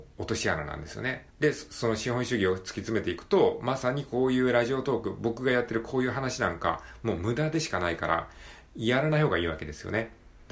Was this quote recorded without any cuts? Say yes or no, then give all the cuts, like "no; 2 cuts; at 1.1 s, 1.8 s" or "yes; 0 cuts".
no; 1 cut; at 1.3 s